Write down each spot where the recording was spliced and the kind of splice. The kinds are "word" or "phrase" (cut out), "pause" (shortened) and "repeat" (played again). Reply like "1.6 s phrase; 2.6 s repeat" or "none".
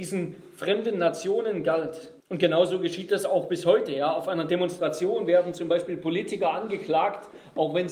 2.2 s pause